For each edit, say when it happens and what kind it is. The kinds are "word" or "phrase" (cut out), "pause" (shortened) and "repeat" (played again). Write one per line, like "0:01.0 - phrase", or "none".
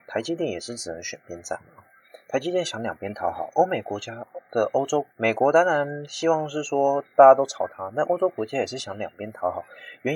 0:05.1 - pause